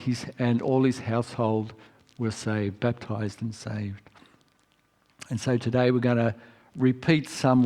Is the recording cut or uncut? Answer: uncut